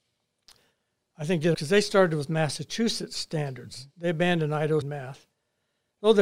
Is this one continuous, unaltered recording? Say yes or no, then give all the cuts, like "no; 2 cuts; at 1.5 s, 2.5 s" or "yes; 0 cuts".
no; 2 cuts; at 1.5 s, 4.8 s